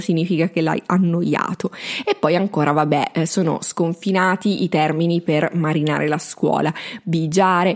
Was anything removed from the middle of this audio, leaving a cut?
no; 0 cuts

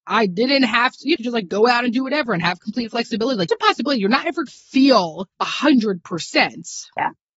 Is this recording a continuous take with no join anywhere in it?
no; 4 cuts; at 1.2 s, 3.5 s, 4.5 s, 5.3 s

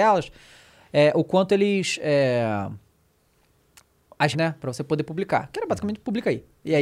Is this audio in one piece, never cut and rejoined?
no; 1 cut; at 4.3 s

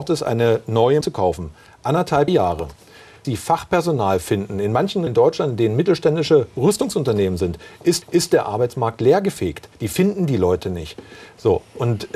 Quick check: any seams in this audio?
yes; 6 cuts; at 1.0 s, 2.3 s, 3.2 s, 5.1 s, 8.0 s, 9.7 s

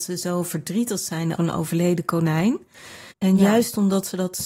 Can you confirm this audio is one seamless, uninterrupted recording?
no; 2 cuts; at 1.4 s, 3.1 s

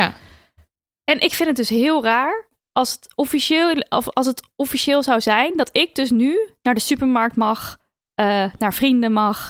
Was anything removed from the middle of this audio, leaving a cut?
no; 0 cuts

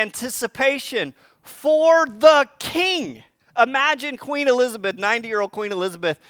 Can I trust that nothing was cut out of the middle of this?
no; 1 cut; at 3.4 s

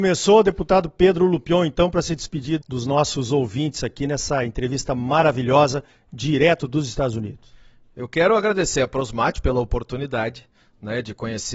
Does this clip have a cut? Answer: no; 0 cuts

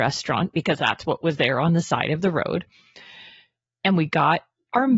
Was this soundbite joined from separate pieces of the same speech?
no; 0 cuts

